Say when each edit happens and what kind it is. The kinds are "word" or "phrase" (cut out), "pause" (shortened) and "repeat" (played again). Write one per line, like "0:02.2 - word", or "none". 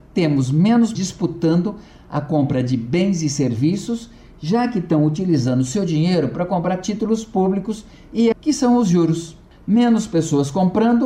0:00.9 - word
0:08.3 - phrase